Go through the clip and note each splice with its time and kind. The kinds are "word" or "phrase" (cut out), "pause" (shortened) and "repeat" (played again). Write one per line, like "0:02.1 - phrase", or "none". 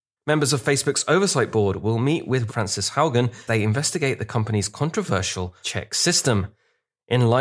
0:02.5 - word
0:03.5 - word
0:05.6 - word